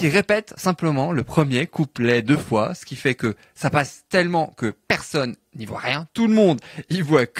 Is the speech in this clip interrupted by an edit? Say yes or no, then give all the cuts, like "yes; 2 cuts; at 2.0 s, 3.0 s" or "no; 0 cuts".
no; 0 cuts